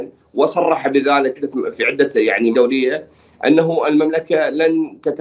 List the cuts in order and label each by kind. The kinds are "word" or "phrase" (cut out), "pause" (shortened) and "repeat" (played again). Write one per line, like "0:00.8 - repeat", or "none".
0:01.4 - word
0:02.5 - word